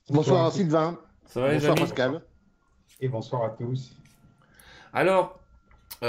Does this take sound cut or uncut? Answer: uncut